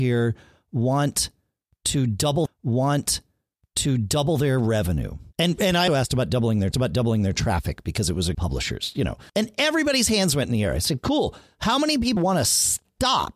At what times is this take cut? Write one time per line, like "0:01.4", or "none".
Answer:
0:02.5
0:05.3
0:05.9
0:06.7
0:08.3
0:09.3
0:12.2